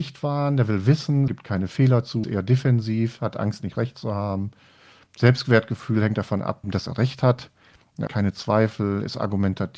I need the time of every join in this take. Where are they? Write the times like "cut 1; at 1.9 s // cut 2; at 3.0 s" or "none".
cut 1; at 1.3 s // cut 2; at 2.2 s // cut 3; at 6.6 s // cut 4; at 8.1 s

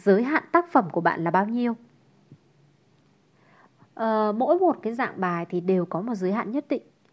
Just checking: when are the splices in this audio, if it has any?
none

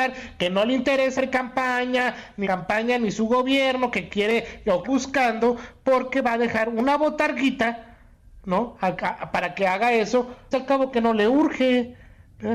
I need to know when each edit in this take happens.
cut 1; at 1.2 s // cut 2; at 2.4 s // cut 3; at 4.8 s // cut 4; at 10.5 s

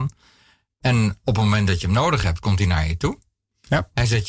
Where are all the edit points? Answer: none

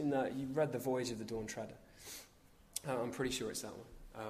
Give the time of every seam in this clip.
none

